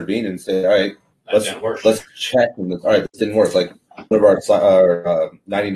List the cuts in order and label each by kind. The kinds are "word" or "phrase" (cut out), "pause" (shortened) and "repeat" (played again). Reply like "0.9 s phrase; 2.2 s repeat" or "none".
1.1 s word; 4.1 s word